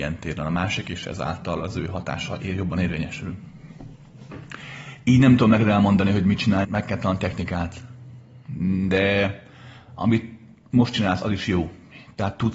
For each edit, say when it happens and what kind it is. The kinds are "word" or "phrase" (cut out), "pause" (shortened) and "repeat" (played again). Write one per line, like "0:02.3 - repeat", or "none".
0:06.6 - word